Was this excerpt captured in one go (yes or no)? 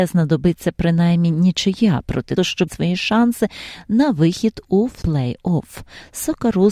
no